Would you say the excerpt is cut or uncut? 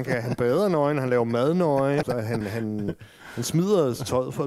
cut